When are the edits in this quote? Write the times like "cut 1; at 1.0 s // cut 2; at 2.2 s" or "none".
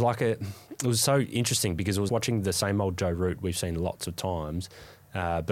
cut 1; at 2.1 s

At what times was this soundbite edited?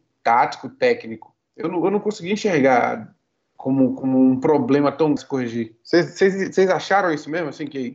cut 1; at 5.2 s

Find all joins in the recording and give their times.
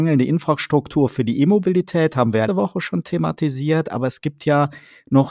cut 1; at 2.5 s

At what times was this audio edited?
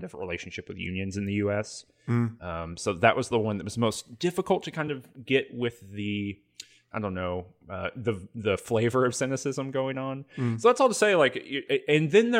none

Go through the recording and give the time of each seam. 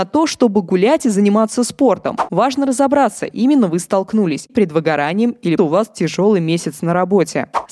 cut 1; at 3.3 s // cut 2; at 4.5 s // cut 3; at 5.6 s

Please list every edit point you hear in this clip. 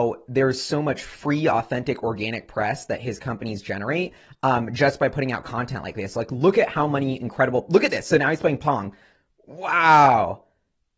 none

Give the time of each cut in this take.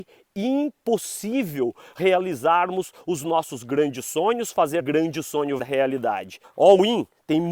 cut 1; at 4.8 s // cut 2; at 5.6 s // cut 3; at 6.4 s

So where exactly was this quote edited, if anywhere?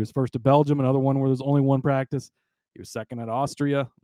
none

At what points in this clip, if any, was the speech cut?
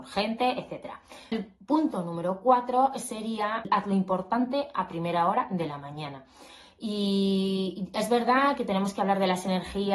none

